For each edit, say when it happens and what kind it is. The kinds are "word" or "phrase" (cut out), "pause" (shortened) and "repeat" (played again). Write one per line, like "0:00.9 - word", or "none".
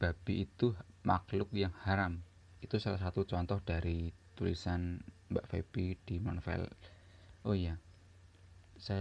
0:05.2 - pause